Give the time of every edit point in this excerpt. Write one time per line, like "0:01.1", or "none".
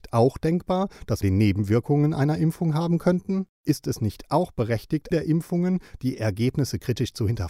0:01.2
0:03.5
0:05.1